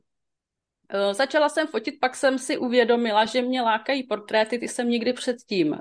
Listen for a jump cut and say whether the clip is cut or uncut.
uncut